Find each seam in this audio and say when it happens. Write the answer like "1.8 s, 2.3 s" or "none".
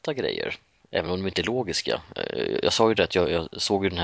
1.1 s